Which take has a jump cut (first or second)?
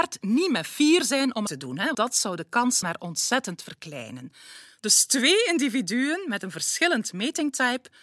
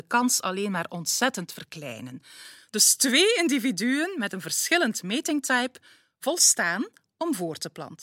first